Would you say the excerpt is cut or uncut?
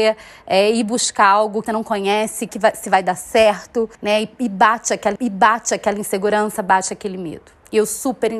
cut